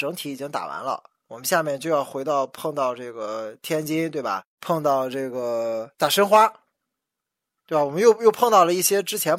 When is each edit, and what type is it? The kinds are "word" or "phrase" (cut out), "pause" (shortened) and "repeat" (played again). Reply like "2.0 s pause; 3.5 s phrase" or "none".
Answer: 4.5 s pause